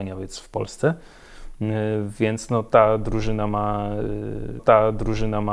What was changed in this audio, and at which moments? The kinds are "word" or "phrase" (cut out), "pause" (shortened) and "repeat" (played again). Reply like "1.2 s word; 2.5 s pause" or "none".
4.6 s repeat

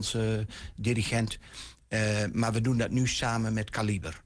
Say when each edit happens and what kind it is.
none

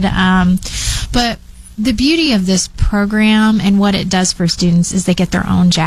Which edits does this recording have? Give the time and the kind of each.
none

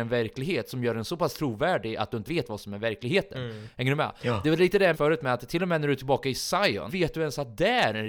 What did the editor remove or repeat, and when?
2.2 s word; 4.9 s word; 6.9 s word

